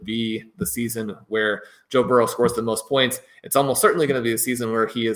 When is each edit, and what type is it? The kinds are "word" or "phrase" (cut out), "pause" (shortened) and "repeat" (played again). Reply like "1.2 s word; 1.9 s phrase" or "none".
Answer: none